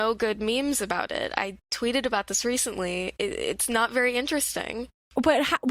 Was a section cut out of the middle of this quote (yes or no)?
no